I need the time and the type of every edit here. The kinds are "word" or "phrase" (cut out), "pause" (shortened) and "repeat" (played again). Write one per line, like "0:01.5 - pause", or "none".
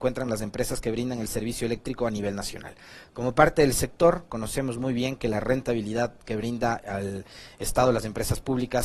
none